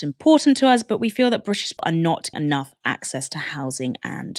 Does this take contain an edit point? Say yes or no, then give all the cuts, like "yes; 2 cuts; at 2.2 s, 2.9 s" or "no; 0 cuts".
yes; 2 cuts; at 1.8 s, 2.3 s